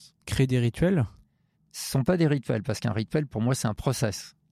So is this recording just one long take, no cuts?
yes; 0 cuts

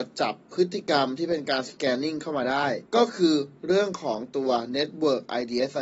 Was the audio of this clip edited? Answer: yes; 1 cut; at 2.9 s

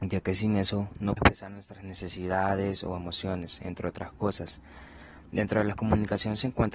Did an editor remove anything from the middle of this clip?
yes; 1 cut; at 1.2 s

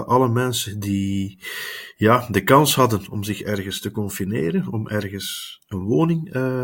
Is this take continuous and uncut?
yes; 0 cuts

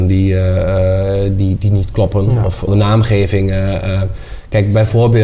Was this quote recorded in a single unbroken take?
no; 1 cut; at 2.7 s

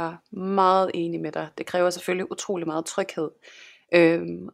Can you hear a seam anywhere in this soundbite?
no; 0 cuts

